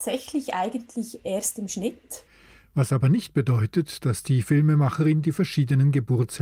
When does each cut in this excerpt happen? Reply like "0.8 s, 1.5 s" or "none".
none